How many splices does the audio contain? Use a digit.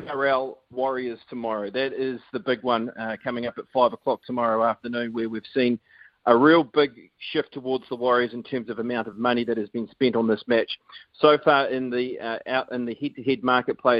0